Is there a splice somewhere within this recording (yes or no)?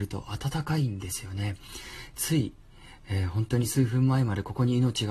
no